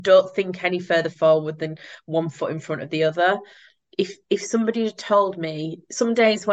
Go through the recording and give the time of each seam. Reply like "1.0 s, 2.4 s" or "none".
none